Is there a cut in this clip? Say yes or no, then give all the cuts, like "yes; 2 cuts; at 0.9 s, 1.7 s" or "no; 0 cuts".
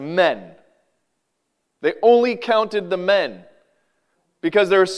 no; 0 cuts